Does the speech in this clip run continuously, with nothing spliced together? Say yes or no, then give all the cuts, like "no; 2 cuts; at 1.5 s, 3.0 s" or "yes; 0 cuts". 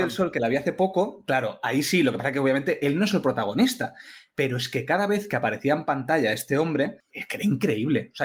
yes; 0 cuts